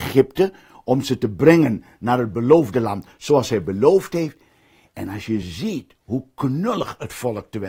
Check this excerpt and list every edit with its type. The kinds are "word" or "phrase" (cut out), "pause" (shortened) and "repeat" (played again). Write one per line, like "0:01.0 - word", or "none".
none